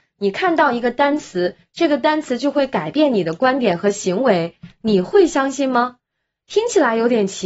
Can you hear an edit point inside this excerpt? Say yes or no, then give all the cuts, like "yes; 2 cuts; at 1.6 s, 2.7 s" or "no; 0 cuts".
no; 0 cuts